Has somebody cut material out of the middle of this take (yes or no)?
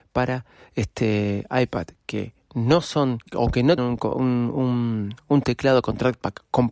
yes